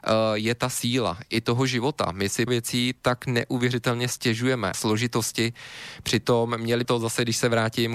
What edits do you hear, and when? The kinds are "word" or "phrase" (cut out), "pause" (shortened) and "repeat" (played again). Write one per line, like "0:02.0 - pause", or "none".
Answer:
0:02.5 - word
0:04.7 - phrase
0:06.8 - word